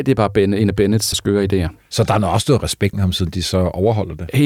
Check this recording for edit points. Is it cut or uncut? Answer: cut